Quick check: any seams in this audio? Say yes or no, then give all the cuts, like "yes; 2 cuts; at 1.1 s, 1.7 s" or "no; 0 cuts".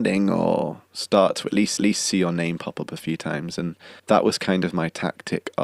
yes; 2 cuts; at 1.8 s, 4.0 s